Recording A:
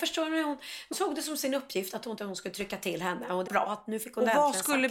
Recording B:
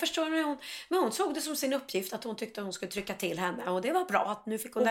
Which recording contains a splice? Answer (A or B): A